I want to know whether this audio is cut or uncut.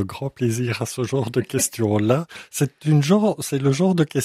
uncut